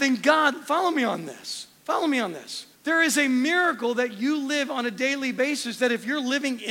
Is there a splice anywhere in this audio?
yes; 2 cuts; at 1.8 s, 2.7 s

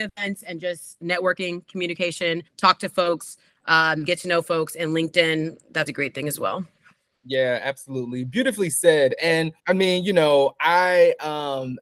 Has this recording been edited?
yes; 3 cuts; at 2.5 s, 5.9 s, 9.6 s

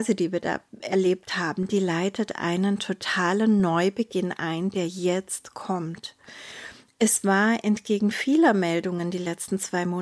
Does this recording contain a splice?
no; 0 cuts

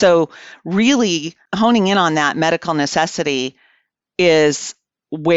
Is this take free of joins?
yes; 0 cuts

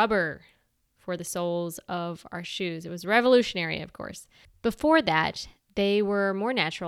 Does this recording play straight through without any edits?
yes; 0 cuts

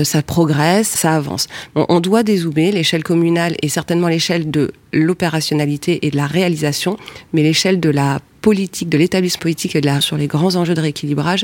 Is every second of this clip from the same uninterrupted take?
no; 3 cuts; at 0.9 s, 9.4 s, 10.0 s

